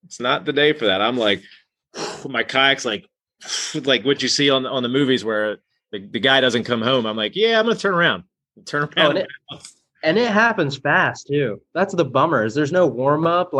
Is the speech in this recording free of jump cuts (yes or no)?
yes